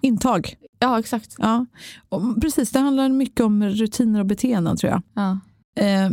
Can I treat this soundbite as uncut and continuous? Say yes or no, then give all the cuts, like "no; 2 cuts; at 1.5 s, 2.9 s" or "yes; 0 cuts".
yes; 0 cuts